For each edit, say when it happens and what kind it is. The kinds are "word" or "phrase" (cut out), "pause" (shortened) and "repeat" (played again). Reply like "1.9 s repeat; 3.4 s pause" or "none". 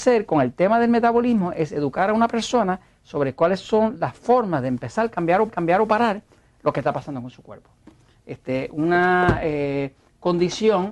5.5 s repeat